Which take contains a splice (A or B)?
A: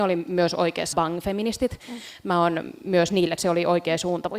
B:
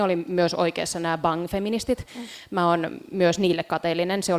A